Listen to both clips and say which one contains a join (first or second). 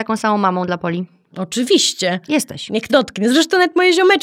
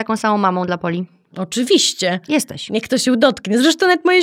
first